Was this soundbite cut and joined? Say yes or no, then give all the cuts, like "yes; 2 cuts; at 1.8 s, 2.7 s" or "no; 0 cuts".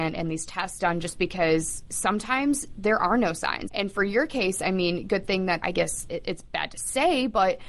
yes; 3 cuts; at 1.9 s, 3.7 s, 5.6 s